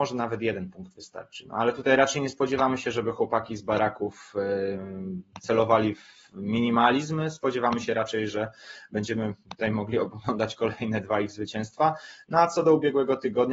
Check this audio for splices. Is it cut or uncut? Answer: uncut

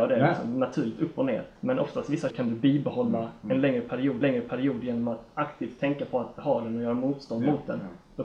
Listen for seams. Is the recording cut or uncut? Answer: cut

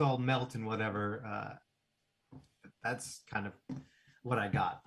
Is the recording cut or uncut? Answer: uncut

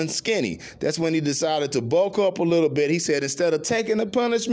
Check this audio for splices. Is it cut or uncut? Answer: uncut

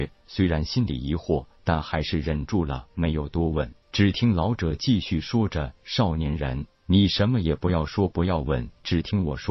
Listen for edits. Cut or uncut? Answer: cut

